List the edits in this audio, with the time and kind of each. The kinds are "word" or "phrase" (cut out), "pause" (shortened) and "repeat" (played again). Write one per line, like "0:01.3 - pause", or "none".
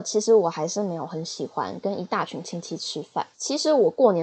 0:03.3 - pause